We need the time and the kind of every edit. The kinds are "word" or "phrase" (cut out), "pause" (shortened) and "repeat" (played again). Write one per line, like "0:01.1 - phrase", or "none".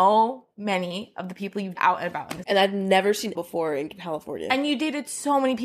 0:01.8 - word
0:02.4 - word
0:03.4 - word

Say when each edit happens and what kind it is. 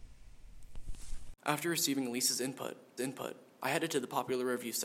0:01.4 - pause
0:03.0 - repeat

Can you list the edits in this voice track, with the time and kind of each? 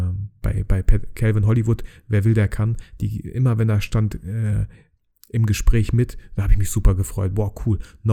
none

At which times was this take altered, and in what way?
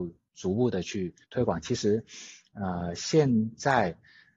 0:01.2 - pause

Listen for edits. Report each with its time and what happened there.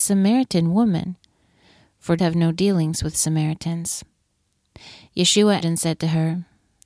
0:02.2 - word
0:05.6 - word

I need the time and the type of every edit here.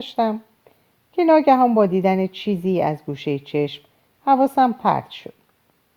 none

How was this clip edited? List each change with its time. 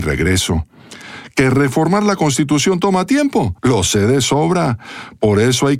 0:03.6 - pause

